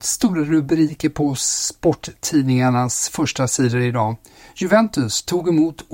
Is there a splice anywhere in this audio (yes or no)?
no